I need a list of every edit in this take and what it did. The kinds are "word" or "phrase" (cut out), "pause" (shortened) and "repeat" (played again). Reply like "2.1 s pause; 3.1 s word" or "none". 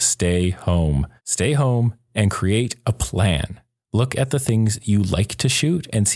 1.2 s pause; 3.8 s pause